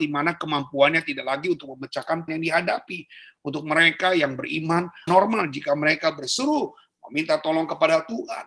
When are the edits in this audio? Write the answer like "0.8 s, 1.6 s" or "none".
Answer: 2.3 s, 5.1 s